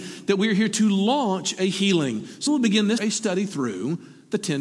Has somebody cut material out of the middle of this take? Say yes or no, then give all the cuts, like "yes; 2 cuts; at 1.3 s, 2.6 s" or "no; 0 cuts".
yes; 2 cuts; at 2.5 s, 3.0 s